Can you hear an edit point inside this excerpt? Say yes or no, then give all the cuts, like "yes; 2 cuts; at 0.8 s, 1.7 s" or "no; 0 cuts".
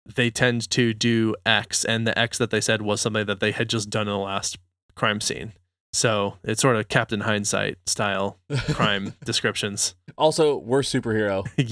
no; 0 cuts